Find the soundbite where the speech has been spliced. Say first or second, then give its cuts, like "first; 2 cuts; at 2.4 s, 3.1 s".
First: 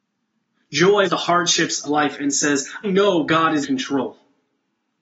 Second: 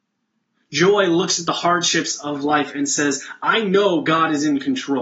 first; 4 cuts; at 1.0 s, 1.8 s, 2.8 s, 3.6 s